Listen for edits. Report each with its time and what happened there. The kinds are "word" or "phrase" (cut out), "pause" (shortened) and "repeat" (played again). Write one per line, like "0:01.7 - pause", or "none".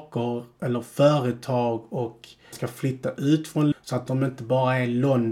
0:02.5 - word
0:03.7 - word